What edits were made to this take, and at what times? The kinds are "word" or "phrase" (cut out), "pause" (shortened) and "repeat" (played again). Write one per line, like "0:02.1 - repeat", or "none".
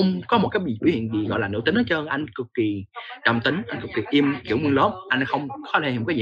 none

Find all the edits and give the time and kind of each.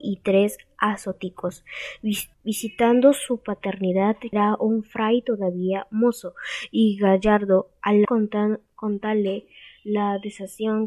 0:02.3 - pause
0:04.3 - word
0:08.0 - phrase

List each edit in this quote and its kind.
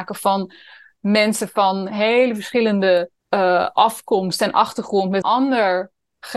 0:03.2 - pause
0:05.2 - word

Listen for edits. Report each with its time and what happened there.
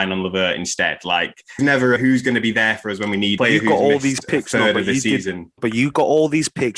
0:01.6 - phrase
0:02.0 - word
0:03.4 - phrase
0:05.6 - word

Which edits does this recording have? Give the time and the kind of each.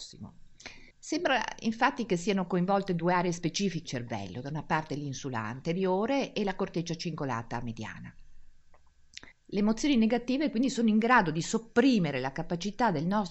0:00.9 - pause
0:03.8 - word
0:09.3 - pause

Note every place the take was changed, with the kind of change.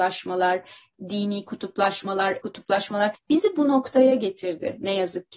0:02.4 - word

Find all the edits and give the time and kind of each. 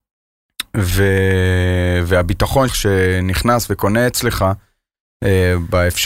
0:02.7 - phrase

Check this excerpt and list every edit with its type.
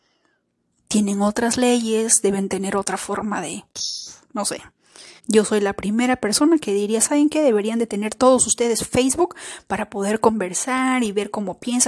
0:05.2 - pause

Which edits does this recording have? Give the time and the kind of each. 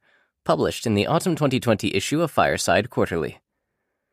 none

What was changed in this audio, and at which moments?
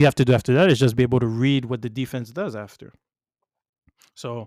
none

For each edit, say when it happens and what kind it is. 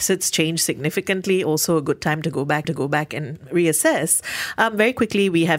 0:02.6 - repeat

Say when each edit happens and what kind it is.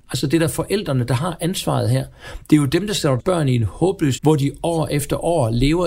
0:03.2 - word
0:04.2 - word

